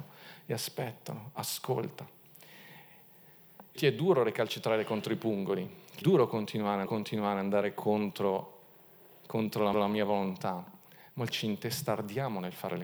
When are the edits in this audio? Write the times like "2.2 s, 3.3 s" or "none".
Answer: 3.8 s, 6.0 s, 6.9 s, 9.7 s, 11.3 s